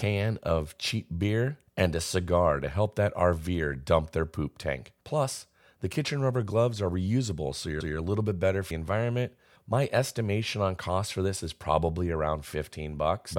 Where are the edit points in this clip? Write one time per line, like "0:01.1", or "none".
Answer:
0:01.7
0:05.0
0:07.8
0:08.7
0:09.6